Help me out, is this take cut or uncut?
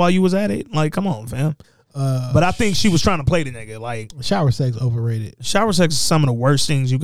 cut